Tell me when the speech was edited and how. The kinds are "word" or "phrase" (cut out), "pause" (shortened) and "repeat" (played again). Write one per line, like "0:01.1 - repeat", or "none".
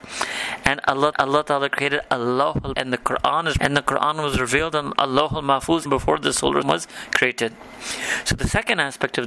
0:01.1 - repeat
0:02.7 - word
0:03.6 - phrase
0:05.9 - word
0:06.6 - word